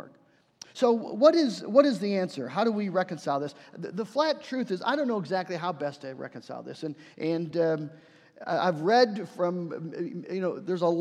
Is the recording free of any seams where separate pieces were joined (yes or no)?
yes